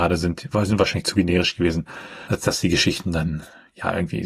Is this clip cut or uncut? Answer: uncut